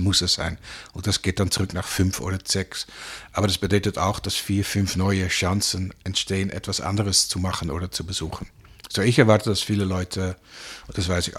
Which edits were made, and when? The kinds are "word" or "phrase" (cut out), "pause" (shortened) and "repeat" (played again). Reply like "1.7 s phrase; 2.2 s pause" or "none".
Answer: none

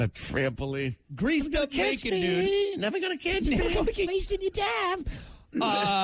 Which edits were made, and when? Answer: 4.1 s word

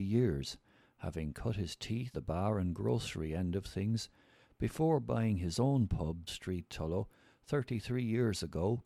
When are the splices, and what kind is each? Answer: 2.1 s word; 6.3 s phrase

